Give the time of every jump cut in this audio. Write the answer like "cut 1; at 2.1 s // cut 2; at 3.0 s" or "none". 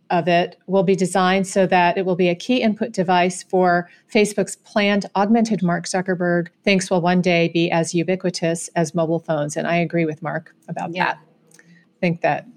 cut 1; at 5.6 s // cut 2; at 6.5 s